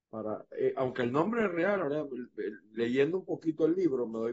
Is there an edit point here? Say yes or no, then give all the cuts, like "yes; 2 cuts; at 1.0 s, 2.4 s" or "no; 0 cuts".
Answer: no; 0 cuts